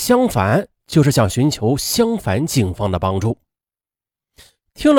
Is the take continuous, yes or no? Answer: yes